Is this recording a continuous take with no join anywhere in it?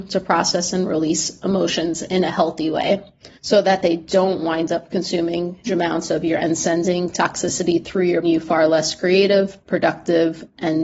no; 4 cuts; at 3.3 s, 5.6 s, 6.4 s, 8.2 s

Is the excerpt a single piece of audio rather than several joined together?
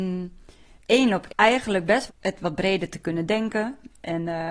no; 2 cuts; at 1.3 s, 2.1 s

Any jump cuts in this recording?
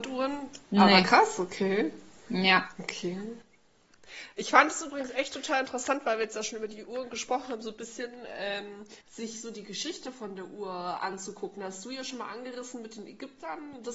yes; 1 cut; at 9.0 s

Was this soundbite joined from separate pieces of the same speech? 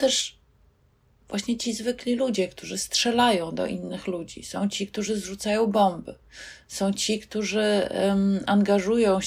no; 0 cuts

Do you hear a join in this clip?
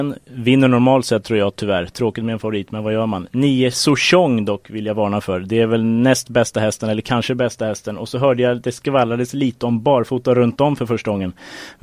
no; 0 cuts

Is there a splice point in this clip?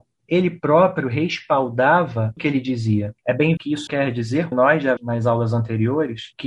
yes; 5 cuts; at 2.4 s, 3.6 s, 3.9 s, 4.5 s, 5.0 s

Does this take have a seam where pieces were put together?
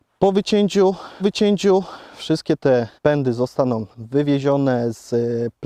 yes; 3 cuts; at 1.2 s, 3.0 s, 3.9 s

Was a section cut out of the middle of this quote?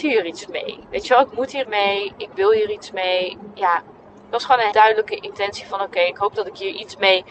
yes; 2 cuts; at 1.6 s, 4.7 s

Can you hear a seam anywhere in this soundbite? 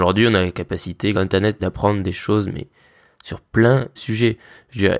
yes; 3 cuts; at 1.1 s, 1.6 s, 4.0 s

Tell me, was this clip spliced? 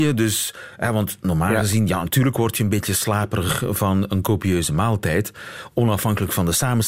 no; 0 cuts

